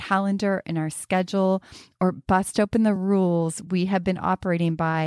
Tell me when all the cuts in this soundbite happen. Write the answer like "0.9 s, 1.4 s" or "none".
none